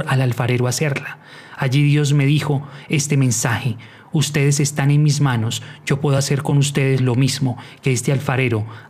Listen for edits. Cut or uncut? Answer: uncut